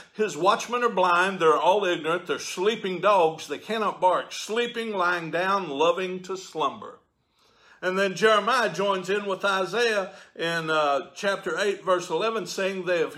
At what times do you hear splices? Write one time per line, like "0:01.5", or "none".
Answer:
none